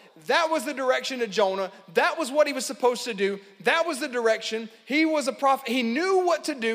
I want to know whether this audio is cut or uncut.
uncut